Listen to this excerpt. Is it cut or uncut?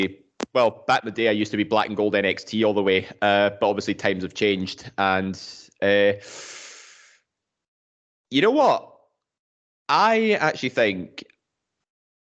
uncut